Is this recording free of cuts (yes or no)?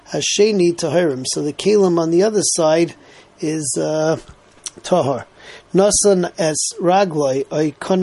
yes